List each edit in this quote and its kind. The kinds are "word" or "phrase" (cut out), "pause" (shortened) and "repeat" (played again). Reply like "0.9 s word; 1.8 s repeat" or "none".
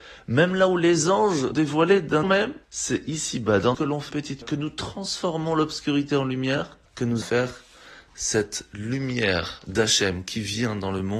1.5 s word; 2.2 s phrase; 2.6 s pause; 3.7 s phrase; 4.1 s word; 4.4 s word; 6.9 s pause; 7.2 s phrase